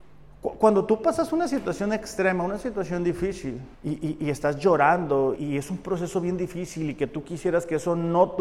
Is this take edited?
yes; 2 cuts; at 3.7 s, 5.4 s

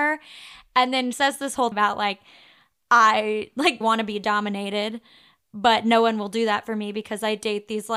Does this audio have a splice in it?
yes; 3 cuts; at 1.1 s, 1.7 s, 3.8 s

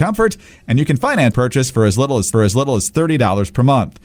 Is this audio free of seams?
no; 2 cuts; at 1.3 s, 2.3 s

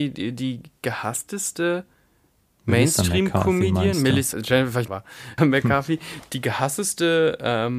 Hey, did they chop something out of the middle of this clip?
yes; 3 cuts; at 4.3 s, 4.9 s, 5.4 s

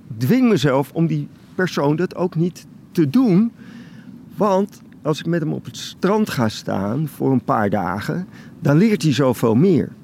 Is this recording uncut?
yes; 0 cuts

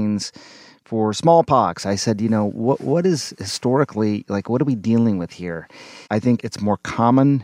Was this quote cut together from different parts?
yes; 2 cuts; at 6.0 s, 6.4 s

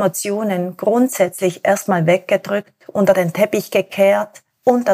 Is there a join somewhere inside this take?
no; 0 cuts

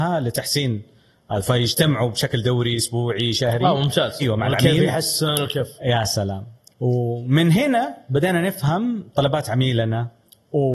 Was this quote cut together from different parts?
yes; 2 cuts; at 4.2 s, 6.7 s

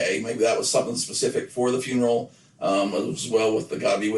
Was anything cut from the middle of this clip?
no; 0 cuts

